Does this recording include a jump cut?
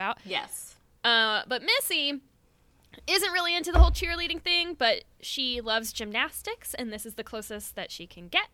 no; 0 cuts

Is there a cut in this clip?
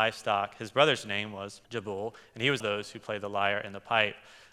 yes; 2 cuts; at 1.6 s, 2.6 s

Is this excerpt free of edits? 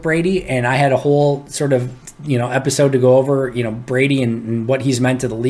yes; 0 cuts

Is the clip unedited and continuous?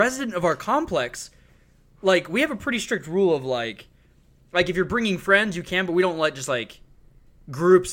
yes; 0 cuts

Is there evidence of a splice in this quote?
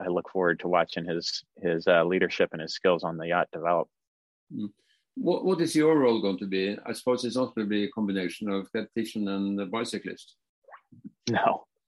no; 0 cuts

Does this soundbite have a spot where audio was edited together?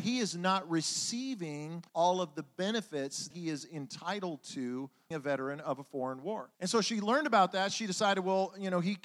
yes; 4 cuts; at 1.9 s, 3.3 s, 5.1 s, 6.5 s

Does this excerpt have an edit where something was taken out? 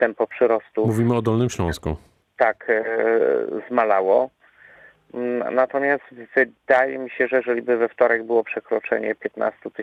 no; 0 cuts

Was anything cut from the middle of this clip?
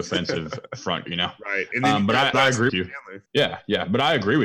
yes; 4 cuts; at 1.1 s, 2.3 s, 2.7 s, 3.3 s

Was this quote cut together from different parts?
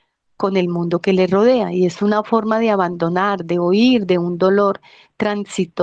no; 0 cuts

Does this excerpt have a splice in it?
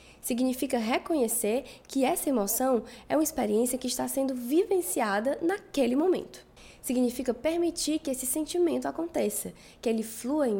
no; 0 cuts

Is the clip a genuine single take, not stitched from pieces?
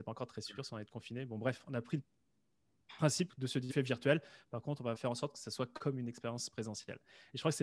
no; 2 cuts; at 3.7 s, 4.9 s

